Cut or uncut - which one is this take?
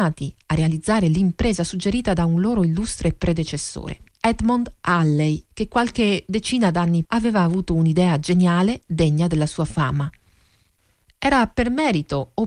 cut